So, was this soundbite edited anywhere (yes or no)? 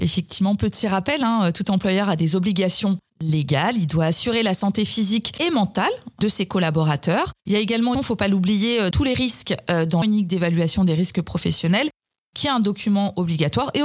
yes